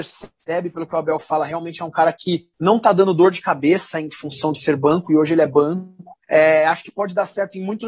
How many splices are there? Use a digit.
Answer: 2